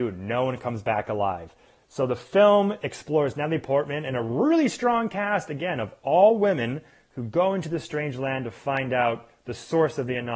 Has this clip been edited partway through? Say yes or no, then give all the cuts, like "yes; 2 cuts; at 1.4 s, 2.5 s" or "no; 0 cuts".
no; 0 cuts